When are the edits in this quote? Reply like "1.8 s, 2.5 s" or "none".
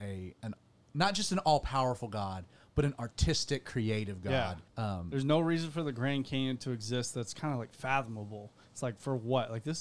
4.7 s